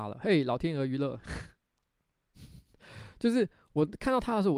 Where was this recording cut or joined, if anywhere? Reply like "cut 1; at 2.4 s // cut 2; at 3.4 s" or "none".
cut 1; at 1.6 s

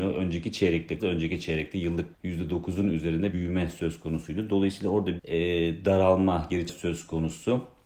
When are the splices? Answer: cut 1; at 1.0 s // cut 2; at 2.1 s // cut 3; at 3.3 s // cut 4; at 5.2 s // cut 5; at 6.7 s

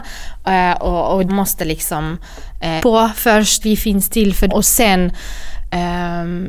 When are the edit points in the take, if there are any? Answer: cut 1; at 1.3 s // cut 2; at 2.8 s // cut 3; at 3.6 s // cut 4; at 4.5 s

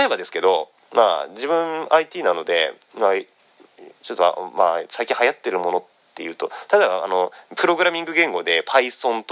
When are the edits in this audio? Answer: none

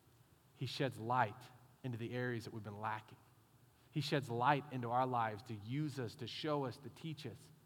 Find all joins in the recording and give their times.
none

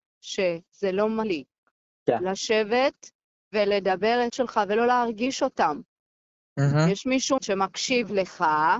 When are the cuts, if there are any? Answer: cut 1; at 1.2 s // cut 2; at 4.3 s // cut 3; at 7.4 s

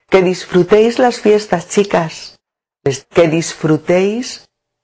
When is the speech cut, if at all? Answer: cut 1; at 3.0 s

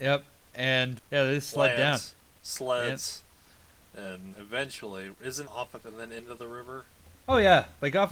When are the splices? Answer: cut 1; at 1.0 s // cut 2; at 4.3 s // cut 3; at 5.4 s // cut 4; at 5.8 s

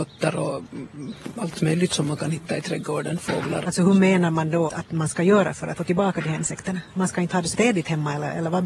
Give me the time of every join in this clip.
cut 1; at 1.9 s // cut 2; at 3.6 s // cut 3; at 4.7 s // cut 4; at 5.8 s // cut 5; at 7.5 s

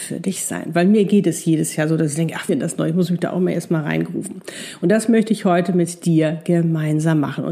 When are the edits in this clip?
cut 1; at 2.5 s

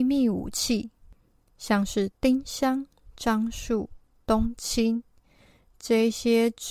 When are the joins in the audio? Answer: none

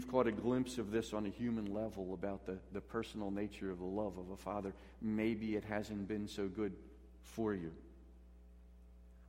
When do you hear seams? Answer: none

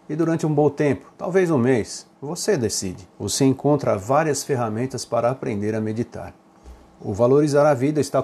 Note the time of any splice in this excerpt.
cut 1; at 1.2 s // cut 2; at 2.2 s // cut 3; at 3.1 s

